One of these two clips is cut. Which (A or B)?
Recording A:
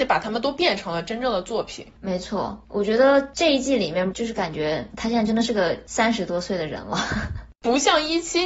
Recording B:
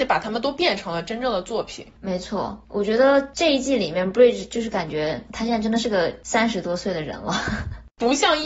A